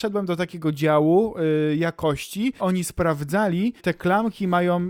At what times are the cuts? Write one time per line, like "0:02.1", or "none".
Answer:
0:02.6
0:03.8